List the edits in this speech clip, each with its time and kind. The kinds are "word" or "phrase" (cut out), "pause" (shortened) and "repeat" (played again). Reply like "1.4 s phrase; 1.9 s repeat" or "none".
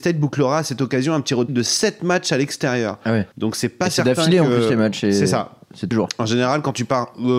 1.5 s word; 3.3 s pause; 5.9 s word